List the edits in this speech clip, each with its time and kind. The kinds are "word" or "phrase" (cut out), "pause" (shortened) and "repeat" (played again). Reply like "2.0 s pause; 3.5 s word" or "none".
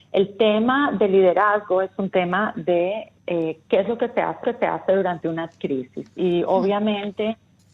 4.4 s repeat